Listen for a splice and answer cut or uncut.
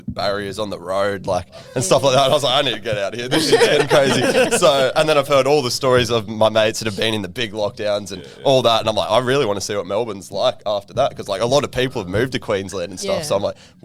uncut